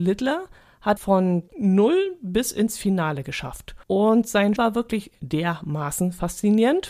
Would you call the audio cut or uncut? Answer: cut